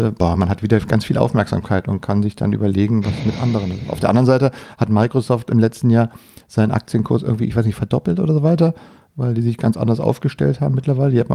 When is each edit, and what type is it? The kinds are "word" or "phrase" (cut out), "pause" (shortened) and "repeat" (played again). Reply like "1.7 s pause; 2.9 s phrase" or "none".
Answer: none